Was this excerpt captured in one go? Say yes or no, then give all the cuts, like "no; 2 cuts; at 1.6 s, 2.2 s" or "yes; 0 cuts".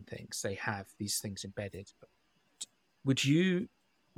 yes; 0 cuts